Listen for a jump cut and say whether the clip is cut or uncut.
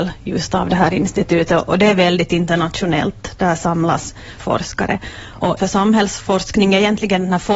cut